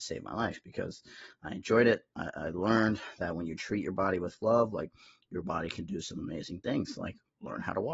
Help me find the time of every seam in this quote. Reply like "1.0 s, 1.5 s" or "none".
none